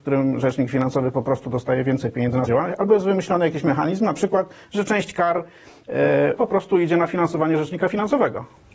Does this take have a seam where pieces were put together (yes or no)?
yes